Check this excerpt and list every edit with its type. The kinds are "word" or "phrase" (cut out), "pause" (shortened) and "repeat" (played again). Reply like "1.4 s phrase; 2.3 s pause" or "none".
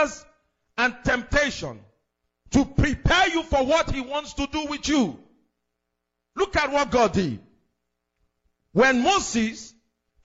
none